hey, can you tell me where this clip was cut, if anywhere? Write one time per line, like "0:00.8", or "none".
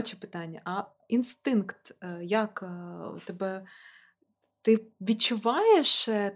none